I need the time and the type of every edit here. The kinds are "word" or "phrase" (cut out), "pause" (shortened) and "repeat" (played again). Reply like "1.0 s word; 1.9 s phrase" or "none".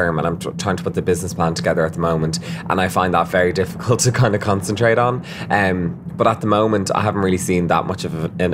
none